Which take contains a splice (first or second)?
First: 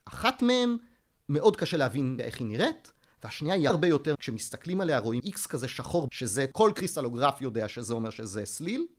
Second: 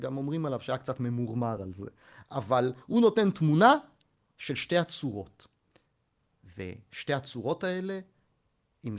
first